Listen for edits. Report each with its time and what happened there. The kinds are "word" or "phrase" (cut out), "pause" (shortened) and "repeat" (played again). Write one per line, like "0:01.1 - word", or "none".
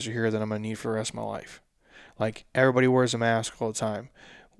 none